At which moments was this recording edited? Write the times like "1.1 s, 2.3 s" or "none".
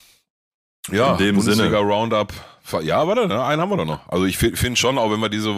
none